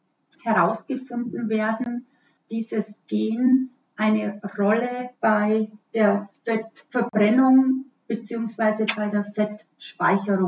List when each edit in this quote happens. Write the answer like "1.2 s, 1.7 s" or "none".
2.4 s, 5.2 s